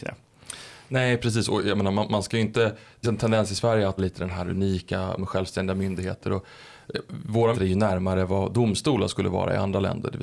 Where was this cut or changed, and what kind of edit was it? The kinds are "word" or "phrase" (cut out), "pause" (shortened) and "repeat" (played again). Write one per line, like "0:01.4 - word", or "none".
0:03.0 - word
0:04.0 - word
0:05.2 - word
0:07.5 - word